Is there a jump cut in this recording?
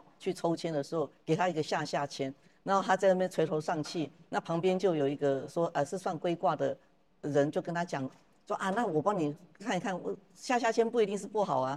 no; 0 cuts

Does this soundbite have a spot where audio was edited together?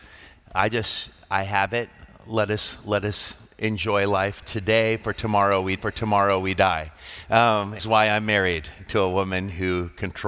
yes; 3 cuts; at 4.4 s, 5.8 s, 7.8 s

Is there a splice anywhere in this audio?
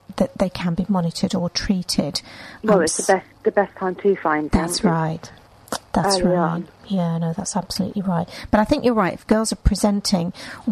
yes; 1 cut; at 4.5 s

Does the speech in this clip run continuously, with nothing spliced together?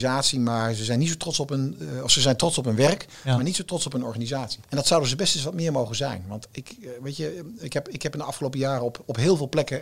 no; 2 cuts; at 4.6 s, 7.6 s

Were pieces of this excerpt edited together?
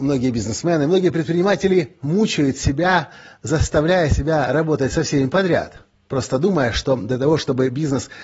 no; 0 cuts

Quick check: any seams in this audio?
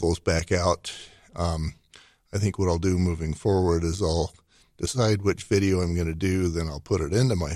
no; 0 cuts

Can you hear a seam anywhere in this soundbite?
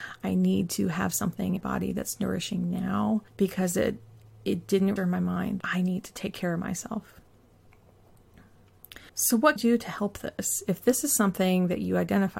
yes; 7 cuts; at 1.6 s, 3.3 s, 4.2 s, 5.0 s, 5.6 s, 9.1 s, 9.6 s

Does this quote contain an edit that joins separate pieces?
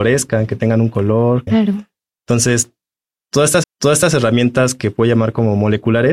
yes; 2 cuts; at 1.5 s, 3.6 s

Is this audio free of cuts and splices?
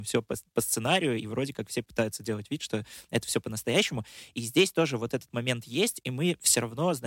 yes; 0 cuts

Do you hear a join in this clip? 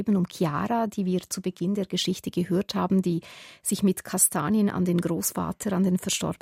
no; 0 cuts

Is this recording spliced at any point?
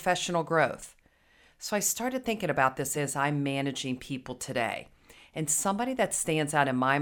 no; 0 cuts

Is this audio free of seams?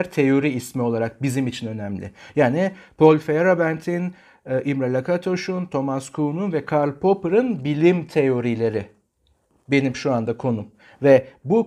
yes; 0 cuts

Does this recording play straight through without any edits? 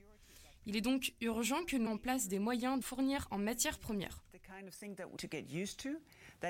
no; 3 cuts; at 1.9 s, 2.8 s, 5.2 s

